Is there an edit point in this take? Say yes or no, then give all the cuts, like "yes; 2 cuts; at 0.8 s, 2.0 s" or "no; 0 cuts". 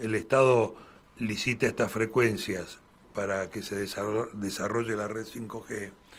no; 0 cuts